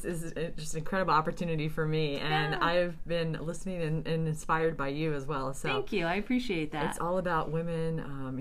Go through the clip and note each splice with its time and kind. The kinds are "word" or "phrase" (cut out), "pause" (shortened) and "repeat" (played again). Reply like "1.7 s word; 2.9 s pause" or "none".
none